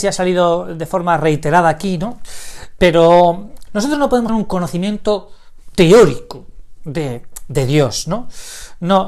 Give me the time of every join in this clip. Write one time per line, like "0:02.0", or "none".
0:03.7
0:04.3
0:06.8